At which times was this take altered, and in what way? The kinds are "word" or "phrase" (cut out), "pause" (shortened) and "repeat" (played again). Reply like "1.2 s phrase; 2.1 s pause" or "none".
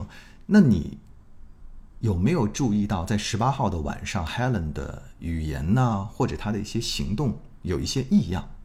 none